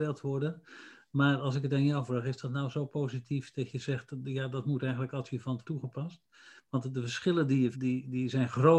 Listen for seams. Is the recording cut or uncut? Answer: cut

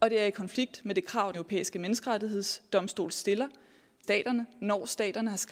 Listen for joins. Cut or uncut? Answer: cut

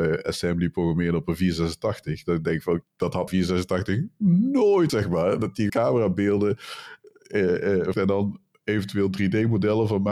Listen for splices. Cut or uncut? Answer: cut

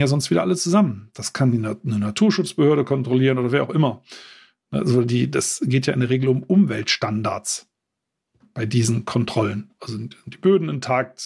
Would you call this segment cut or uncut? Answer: uncut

